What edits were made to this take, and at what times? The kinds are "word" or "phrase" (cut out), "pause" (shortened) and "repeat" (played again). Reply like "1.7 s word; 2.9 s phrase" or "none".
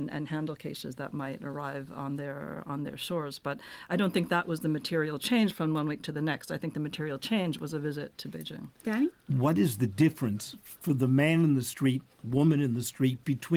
8.8 s pause